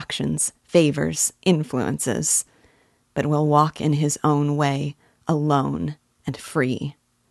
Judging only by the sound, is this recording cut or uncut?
uncut